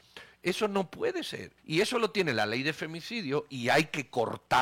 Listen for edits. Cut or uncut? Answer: cut